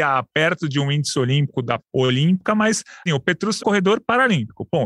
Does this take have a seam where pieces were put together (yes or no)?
yes